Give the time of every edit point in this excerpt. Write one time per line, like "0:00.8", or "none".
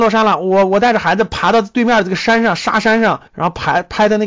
0:03.3